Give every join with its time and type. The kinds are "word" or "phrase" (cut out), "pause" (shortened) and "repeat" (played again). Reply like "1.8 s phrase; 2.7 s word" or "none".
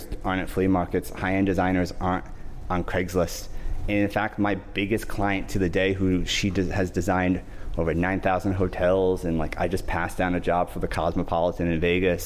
none